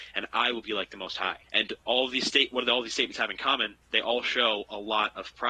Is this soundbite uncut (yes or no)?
no